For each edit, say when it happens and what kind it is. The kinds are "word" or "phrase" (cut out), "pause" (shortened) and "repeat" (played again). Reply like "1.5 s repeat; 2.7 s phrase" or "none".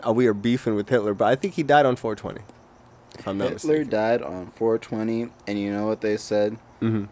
none

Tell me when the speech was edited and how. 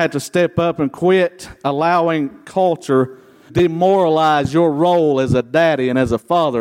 3.5 s word

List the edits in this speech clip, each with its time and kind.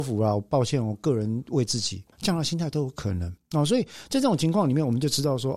2.1 s pause; 3.4 s pause

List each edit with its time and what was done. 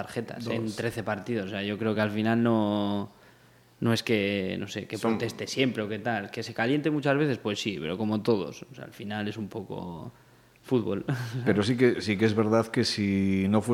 none

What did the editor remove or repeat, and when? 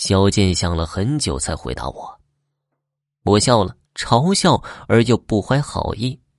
3.9 s pause

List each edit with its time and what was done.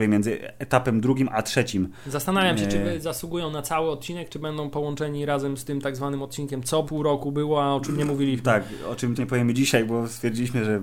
6.8 s word; 9.2 s word

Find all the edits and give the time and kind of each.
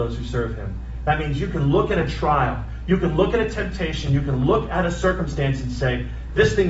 none

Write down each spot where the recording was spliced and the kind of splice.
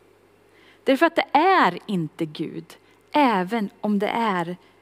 none

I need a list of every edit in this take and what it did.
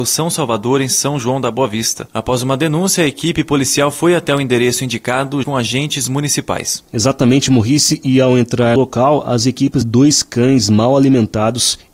5.4 s word; 8.8 s word; 9.8 s word

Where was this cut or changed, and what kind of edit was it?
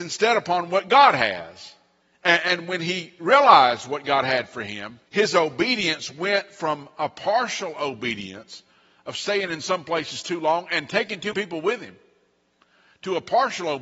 2.0 s pause; 5.1 s pause; 11.3 s word

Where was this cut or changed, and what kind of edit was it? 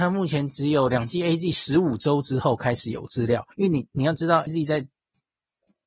3.5 s pause; 4.5 s word

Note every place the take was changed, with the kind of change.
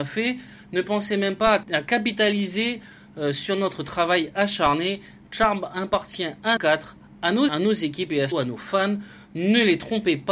1.6 s word; 6.6 s word; 7.5 s word; 8.3 s word

